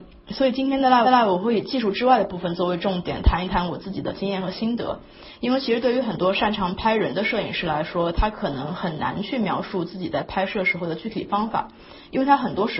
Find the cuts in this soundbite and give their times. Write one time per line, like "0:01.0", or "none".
0:01.0

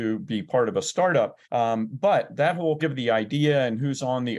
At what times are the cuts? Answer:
0:01.4
0:02.8

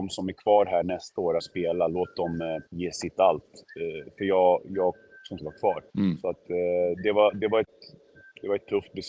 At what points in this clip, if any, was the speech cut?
0:01.4
0:02.7
0:05.4
0:05.9

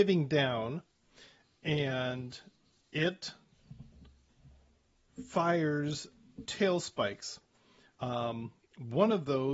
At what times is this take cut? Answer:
0:06.4

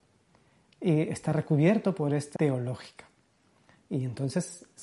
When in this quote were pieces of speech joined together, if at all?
0:02.4

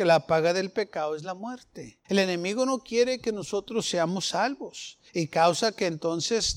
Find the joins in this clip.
0:02.0
0:05.1

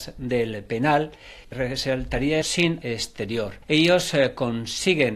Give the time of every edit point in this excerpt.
0:01.4
0:02.4
0:02.8

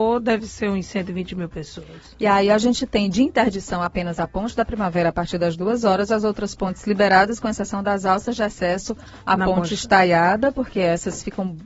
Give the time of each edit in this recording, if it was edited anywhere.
none

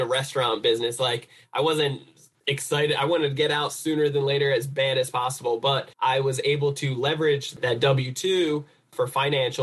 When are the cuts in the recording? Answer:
0:05.9

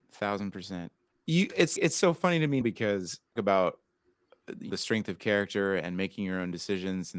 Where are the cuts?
0:01.8
0:02.6
0:03.4
0:04.7

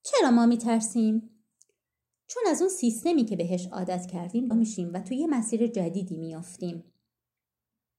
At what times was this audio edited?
0:04.5

